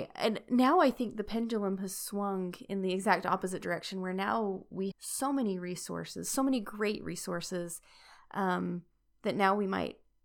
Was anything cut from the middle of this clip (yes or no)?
yes